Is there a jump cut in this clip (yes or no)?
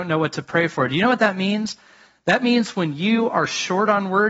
no